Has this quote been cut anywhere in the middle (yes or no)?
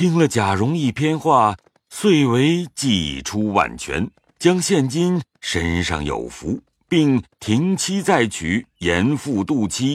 no